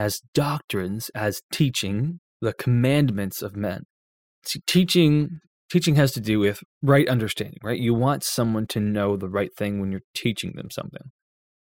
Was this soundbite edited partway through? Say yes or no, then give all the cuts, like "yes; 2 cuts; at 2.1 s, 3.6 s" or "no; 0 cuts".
yes; 3 cuts; at 2.3 s, 4.1 s, 6.7 s